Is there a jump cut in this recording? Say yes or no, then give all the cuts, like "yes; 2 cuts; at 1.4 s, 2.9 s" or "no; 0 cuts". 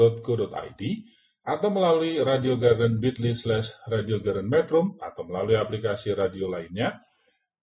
no; 0 cuts